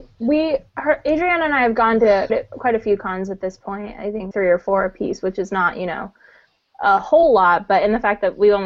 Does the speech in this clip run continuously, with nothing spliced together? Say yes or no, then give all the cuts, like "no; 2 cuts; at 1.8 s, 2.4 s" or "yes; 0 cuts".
no; 2 cuts; at 2.3 s, 4.3 s